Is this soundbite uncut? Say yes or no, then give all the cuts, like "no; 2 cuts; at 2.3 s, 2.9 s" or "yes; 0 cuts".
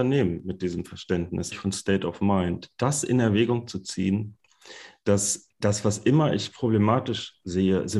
no; 2 cuts; at 1.5 s, 5.5 s